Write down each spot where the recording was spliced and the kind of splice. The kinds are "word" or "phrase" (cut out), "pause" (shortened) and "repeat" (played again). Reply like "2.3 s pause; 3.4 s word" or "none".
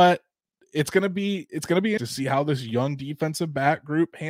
2.0 s word